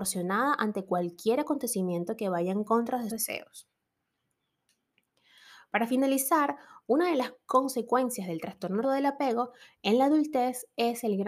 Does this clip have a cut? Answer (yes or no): yes